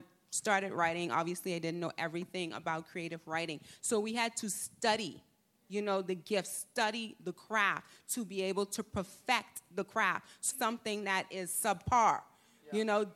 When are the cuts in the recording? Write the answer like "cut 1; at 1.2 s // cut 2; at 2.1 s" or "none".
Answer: cut 1; at 10.5 s